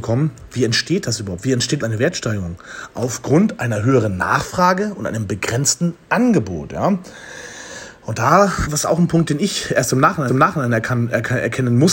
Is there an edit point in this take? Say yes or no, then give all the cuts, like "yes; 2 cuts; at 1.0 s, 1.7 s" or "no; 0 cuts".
yes; 3 cuts; at 1.8 s, 8.6 s, 10.3 s